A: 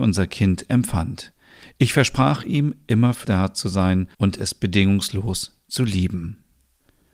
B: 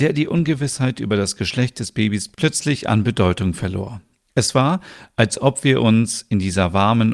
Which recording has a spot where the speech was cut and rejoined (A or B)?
A